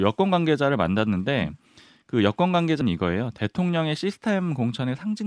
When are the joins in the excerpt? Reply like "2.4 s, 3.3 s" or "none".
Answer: 2.8 s